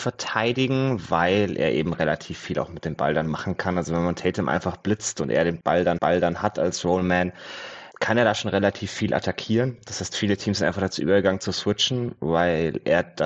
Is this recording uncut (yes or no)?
no